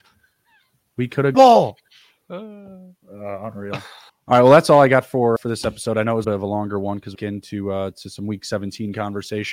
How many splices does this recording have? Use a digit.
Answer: 6